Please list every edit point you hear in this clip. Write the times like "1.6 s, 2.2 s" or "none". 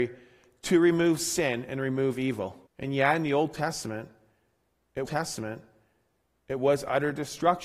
2.7 s, 5.1 s